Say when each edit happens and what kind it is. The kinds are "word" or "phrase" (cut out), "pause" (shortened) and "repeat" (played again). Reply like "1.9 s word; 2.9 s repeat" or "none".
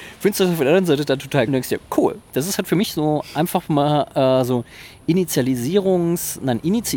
1.5 s word